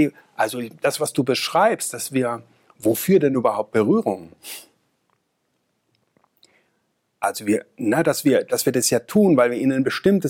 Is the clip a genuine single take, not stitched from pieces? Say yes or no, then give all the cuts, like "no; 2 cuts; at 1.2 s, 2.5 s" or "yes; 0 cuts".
yes; 0 cuts